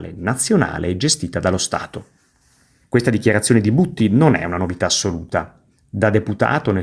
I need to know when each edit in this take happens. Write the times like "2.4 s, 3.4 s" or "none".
none